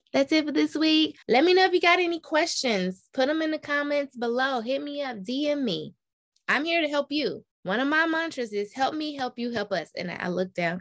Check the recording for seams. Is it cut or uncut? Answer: cut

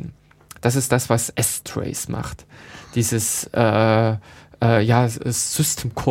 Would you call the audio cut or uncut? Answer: uncut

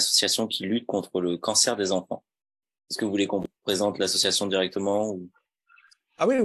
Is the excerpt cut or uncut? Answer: uncut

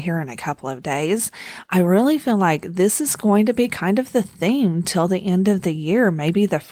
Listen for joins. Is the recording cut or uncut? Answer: uncut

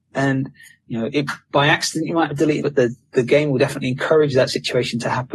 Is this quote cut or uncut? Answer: cut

